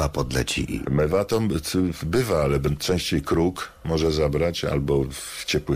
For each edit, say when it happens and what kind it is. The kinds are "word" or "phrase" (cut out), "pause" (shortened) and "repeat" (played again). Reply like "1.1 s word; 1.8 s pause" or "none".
none